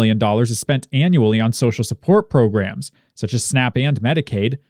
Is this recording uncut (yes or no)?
yes